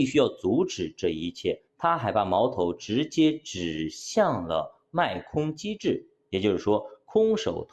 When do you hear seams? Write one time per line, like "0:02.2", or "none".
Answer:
0:01.7